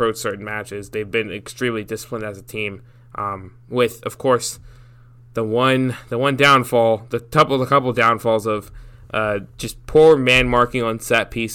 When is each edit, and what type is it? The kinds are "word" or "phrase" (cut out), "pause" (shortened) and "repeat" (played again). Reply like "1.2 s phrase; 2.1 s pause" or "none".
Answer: none